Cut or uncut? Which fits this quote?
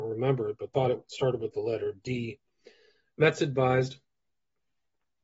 uncut